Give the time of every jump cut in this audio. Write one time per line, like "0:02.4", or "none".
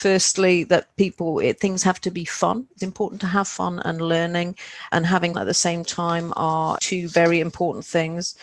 0:02.8
0:04.9
0:05.3
0:06.8